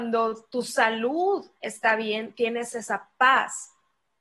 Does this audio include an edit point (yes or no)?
no